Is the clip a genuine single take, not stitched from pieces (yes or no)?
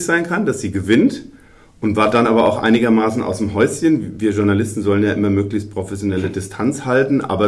yes